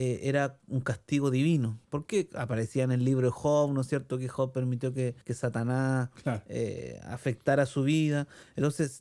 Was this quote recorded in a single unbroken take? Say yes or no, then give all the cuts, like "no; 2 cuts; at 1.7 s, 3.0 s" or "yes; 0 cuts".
no; 2 cuts; at 1.8 s, 5.2 s